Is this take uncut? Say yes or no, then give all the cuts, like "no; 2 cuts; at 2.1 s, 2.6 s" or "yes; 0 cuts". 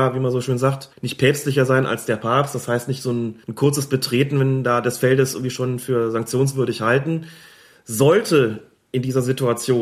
no; 2 cuts; at 0.9 s, 3.4 s